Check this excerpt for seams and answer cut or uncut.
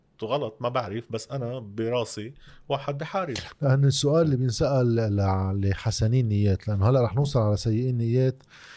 uncut